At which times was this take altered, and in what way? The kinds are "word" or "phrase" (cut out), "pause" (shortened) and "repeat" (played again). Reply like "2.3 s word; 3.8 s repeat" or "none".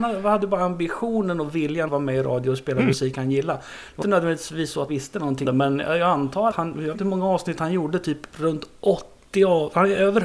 1.9 s word; 4.0 s word; 4.9 s word; 5.4 s word; 6.5 s word; 6.9 s word